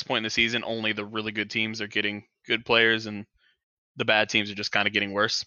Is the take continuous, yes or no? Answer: yes